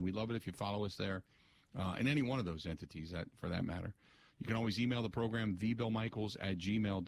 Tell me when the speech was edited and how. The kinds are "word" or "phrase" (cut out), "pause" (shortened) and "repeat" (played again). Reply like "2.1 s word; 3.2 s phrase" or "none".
none